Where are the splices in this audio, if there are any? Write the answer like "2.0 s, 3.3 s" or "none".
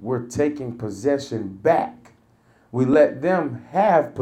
none